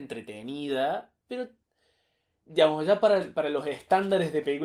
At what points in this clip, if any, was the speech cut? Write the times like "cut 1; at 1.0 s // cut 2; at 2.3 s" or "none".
cut 1; at 1.2 s